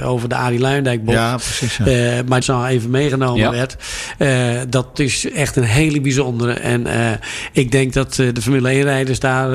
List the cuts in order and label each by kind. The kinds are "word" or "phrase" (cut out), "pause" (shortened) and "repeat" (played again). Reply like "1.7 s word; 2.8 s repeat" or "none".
2.4 s phrase; 4.9 s word